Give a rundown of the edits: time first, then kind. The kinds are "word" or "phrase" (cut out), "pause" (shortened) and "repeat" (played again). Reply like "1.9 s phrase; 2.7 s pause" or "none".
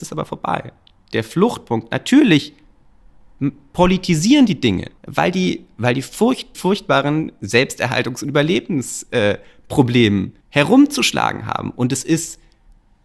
5.0 s pause; 6.5 s phrase; 10.4 s pause

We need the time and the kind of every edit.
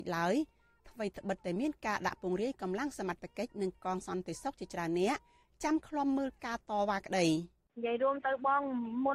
none

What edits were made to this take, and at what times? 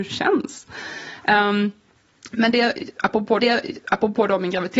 3.4 s repeat

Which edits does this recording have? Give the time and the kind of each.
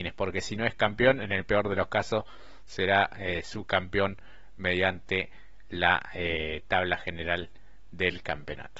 none

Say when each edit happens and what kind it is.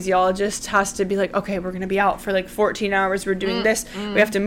none

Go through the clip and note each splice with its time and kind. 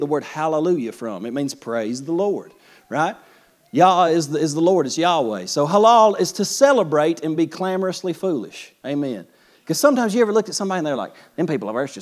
none

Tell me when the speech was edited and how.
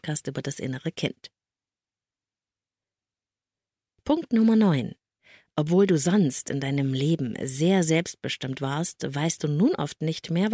none

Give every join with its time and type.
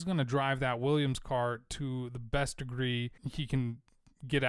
3.2 s pause

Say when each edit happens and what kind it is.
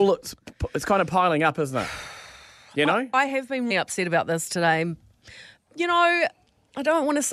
3.7 s word

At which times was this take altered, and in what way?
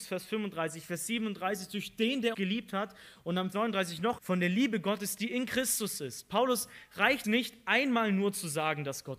2.3 s word; 3.5 s word; 4.2 s word; 7.2 s word

